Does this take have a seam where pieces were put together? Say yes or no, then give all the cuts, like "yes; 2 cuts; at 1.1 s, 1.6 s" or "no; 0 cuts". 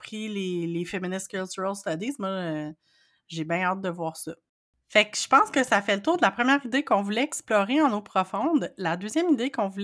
no; 0 cuts